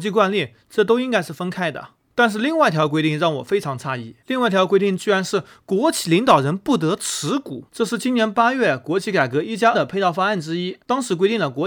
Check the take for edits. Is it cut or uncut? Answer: cut